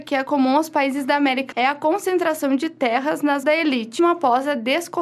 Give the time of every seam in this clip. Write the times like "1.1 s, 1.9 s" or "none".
1.5 s, 3.4 s, 4.0 s